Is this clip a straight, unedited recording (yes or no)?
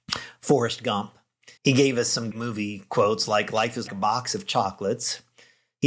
no